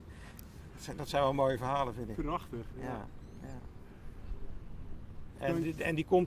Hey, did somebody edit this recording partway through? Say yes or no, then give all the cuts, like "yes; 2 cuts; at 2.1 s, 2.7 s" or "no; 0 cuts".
no; 0 cuts